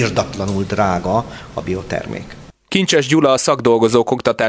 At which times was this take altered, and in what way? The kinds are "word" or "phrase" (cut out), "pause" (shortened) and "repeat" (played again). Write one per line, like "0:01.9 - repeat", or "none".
none